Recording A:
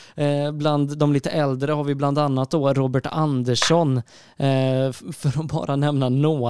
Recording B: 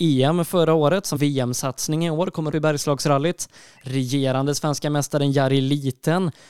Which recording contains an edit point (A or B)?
B